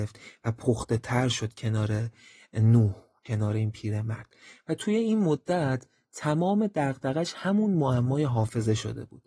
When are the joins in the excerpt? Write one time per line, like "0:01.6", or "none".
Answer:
none